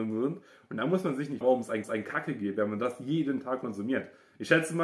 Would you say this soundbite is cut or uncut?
cut